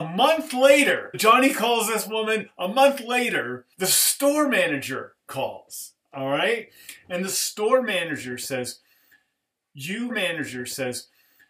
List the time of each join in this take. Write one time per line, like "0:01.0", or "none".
0:01.1
0:03.7
0:10.1